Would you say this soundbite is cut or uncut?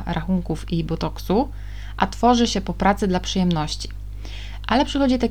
uncut